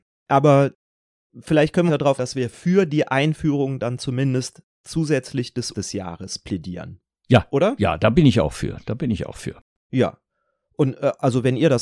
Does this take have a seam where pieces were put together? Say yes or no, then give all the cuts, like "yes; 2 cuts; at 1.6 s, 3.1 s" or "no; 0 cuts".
yes; 3 cuts; at 1.9 s, 2.2 s, 5.7 s